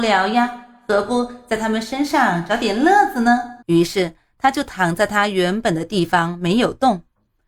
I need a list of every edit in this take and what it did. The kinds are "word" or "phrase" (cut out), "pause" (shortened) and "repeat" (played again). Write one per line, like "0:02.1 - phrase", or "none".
0:03.6 - pause